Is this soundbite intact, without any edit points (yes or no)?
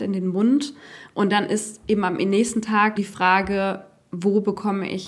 no